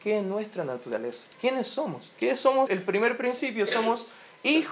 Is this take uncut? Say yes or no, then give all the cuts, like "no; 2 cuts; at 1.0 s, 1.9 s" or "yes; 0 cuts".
no; 2 cuts; at 1.3 s, 2.7 s